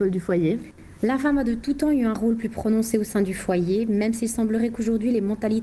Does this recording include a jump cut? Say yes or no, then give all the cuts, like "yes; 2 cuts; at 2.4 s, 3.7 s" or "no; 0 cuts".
no; 0 cuts